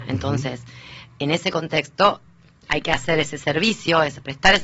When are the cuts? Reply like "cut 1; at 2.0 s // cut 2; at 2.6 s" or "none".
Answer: none